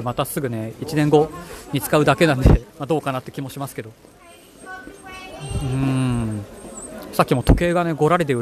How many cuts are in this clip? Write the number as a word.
one